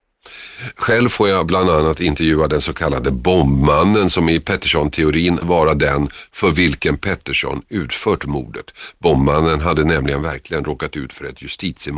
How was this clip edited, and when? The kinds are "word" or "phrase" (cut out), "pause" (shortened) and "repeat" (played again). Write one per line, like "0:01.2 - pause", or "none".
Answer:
0:05.4 - word

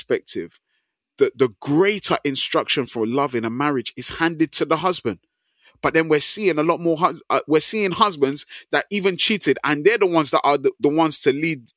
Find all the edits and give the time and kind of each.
none

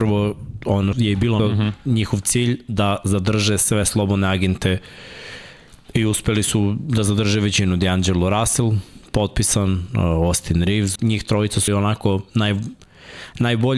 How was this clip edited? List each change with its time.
0:00.9 - word
0:01.4 - word
0:11.0 - phrase
0:11.7 - word

